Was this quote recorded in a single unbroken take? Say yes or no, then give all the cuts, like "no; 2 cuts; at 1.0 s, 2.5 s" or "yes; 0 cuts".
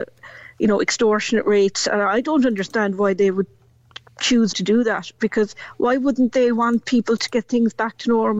no; 1 cut; at 4.5 s